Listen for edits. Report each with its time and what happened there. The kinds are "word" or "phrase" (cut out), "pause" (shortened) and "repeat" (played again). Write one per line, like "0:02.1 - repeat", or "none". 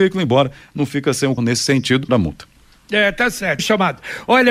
0:01.4 - word
0:02.1 - word
0:03.6 - word

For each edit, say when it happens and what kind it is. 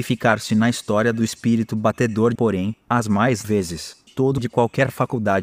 0:02.4 - phrase
0:03.4 - word
0:04.1 - word
0:04.4 - word

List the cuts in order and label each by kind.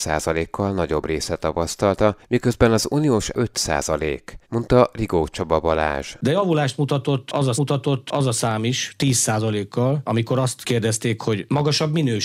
0:03.3 - phrase
0:04.4 - pause
0:07.6 - repeat

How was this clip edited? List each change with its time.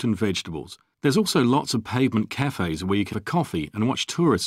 0:00.9 - pause
0:03.1 - word

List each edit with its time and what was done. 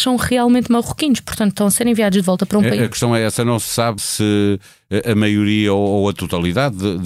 0:04.0 - word

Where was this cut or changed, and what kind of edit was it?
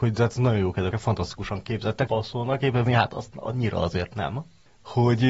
0:00.9 - phrase
0:02.1 - word
0:02.9 - word

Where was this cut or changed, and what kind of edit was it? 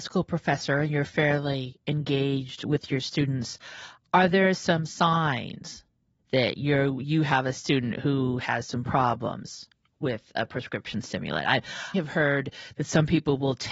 0:11.9 - word

